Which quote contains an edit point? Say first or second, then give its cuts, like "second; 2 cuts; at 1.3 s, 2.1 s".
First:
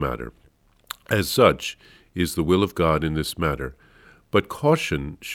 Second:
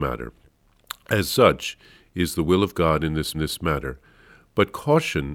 second; 1 cut; at 3.3 s